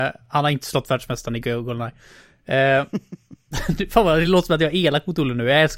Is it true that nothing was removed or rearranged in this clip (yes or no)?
yes